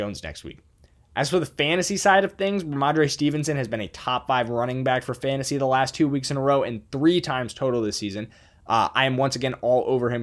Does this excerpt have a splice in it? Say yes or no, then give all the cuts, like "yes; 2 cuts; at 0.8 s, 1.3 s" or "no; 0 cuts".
no; 0 cuts